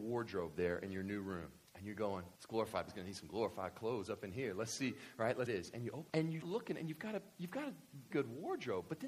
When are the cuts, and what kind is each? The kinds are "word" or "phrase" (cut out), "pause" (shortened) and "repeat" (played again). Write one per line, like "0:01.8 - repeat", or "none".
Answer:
0:01.7 - pause
0:02.4 - pause
0:02.9 - word
0:05.5 - phrase
0:06.1 - word
0:06.4 - word
0:08.1 - word